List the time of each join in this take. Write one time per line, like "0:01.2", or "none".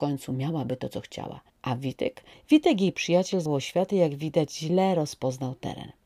0:01.5
0:02.3
0:03.5